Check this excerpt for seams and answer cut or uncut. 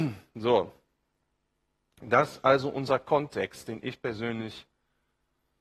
uncut